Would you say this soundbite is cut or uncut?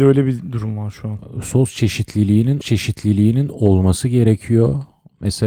cut